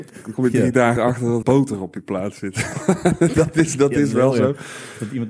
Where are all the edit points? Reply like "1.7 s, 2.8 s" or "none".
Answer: 1.0 s, 1.4 s